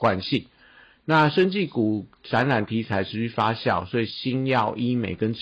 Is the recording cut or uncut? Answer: uncut